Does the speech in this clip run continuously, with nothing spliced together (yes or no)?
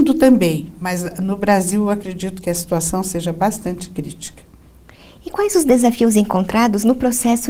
yes